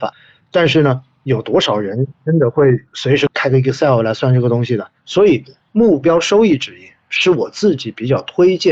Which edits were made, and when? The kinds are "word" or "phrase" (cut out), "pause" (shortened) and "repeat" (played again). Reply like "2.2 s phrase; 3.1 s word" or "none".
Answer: 5.0 s pause